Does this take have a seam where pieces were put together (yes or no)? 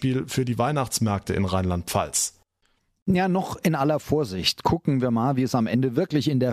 no